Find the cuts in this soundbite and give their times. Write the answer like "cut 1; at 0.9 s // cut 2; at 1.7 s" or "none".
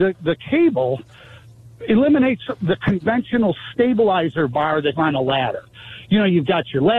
cut 1; at 5.0 s